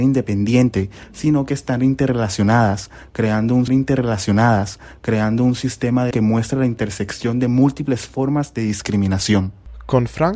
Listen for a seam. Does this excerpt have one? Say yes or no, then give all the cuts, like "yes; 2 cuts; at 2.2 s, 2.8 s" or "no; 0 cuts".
yes; 2 cuts; at 3.7 s, 6.1 s